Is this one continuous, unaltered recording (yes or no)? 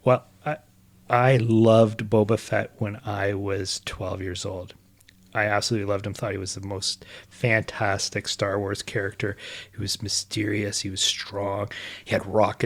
yes